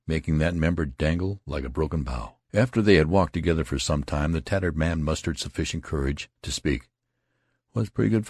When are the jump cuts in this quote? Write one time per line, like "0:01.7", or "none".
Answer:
0:02.4
0:06.4